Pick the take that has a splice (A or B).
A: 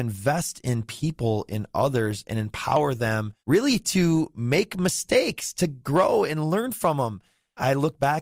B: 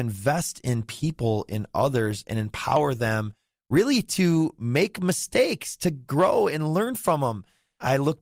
A